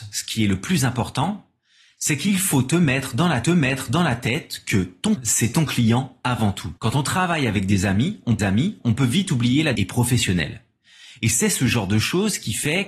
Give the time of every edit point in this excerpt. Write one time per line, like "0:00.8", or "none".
0:03.4
0:05.2
0:06.8
0:08.4
0:09.7